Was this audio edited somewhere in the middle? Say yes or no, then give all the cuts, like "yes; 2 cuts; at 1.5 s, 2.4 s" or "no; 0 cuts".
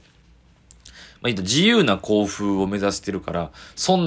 no; 0 cuts